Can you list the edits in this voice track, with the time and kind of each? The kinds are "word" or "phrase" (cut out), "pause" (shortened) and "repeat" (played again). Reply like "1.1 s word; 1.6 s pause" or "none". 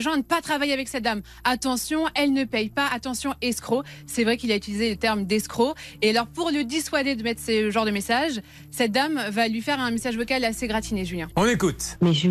none